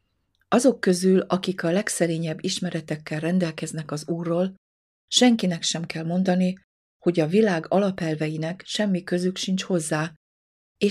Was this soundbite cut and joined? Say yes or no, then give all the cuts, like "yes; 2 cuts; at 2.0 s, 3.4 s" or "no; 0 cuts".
no; 0 cuts